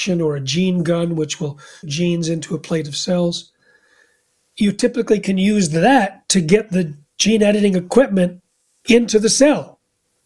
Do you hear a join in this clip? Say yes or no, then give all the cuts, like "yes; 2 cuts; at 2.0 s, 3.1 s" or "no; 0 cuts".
yes; 1 cut; at 1.8 s